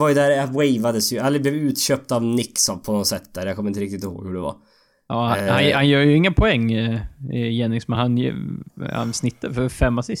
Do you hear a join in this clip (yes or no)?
no